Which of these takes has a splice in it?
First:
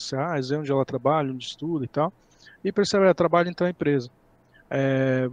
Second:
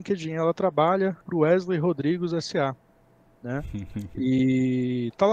second; 1 cut; at 1.2 s

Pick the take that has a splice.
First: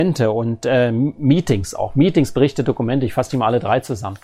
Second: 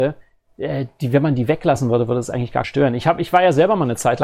second; 1 cut; at 2.6 s

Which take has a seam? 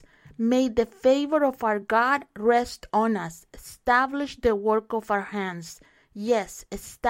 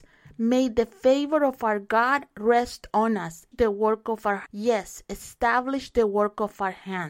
second; 2 cuts; at 3.5 s, 4.5 s

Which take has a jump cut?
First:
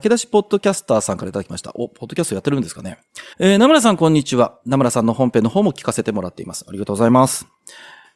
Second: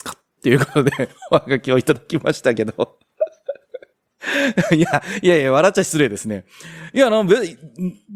first; 1 cut; at 3.3 s

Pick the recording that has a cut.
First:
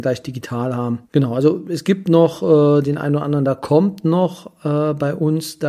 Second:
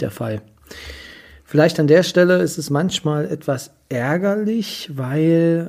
first; 1 cut; at 1.0 s

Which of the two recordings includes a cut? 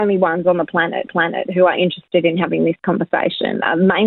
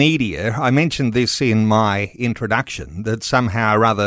first; 1 cut; at 1.1 s

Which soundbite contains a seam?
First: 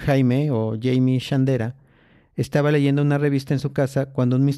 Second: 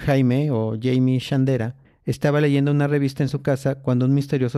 second; 1 cut; at 1.8 s

